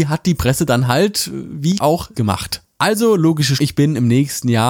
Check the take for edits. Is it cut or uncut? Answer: cut